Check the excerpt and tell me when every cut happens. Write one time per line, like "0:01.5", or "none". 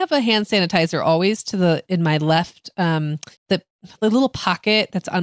0:03.4